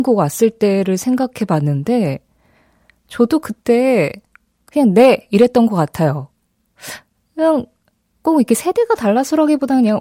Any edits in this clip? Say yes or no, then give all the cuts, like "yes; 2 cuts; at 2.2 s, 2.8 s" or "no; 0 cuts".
no; 0 cuts